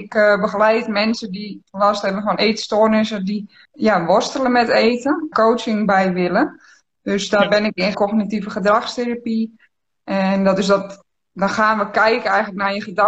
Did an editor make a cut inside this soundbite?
yes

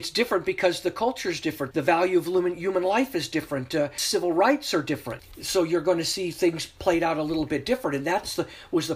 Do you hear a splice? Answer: yes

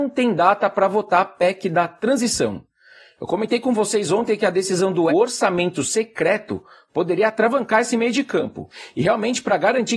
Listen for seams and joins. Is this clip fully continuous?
no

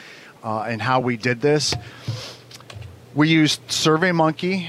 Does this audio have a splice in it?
no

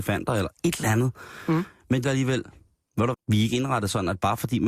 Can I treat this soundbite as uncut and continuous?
no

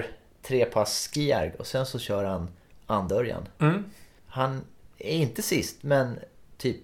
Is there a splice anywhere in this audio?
yes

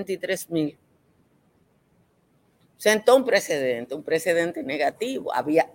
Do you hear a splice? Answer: no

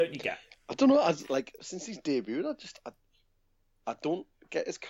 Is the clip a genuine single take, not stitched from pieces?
no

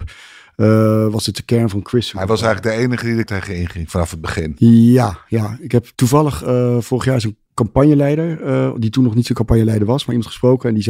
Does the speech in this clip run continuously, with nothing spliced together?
no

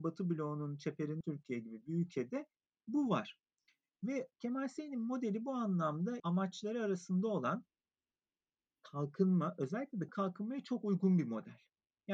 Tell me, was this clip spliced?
yes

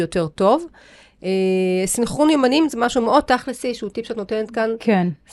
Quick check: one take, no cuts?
yes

